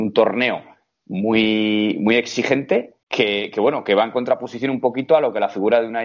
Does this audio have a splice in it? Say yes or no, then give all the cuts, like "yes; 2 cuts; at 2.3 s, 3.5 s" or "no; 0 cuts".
yes; 1 cut; at 3.0 s